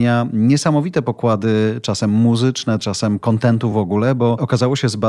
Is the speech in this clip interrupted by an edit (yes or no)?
no